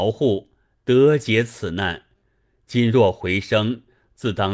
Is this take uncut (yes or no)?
yes